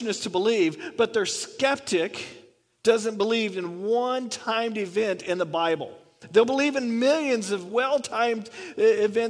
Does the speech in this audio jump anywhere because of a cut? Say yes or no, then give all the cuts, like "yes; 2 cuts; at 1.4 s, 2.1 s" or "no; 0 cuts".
no; 0 cuts